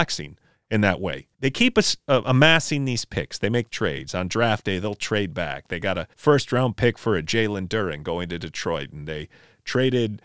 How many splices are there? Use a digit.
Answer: 3